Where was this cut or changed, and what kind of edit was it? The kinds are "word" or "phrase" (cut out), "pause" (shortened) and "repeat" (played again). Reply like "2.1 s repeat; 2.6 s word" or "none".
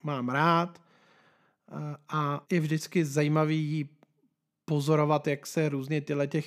2.4 s pause